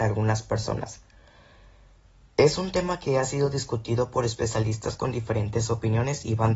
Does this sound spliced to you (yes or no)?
no